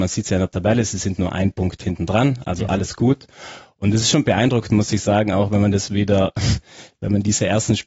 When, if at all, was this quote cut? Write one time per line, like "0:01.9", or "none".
none